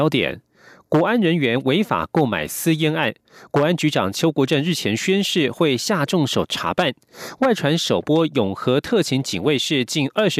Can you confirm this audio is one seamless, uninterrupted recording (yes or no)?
yes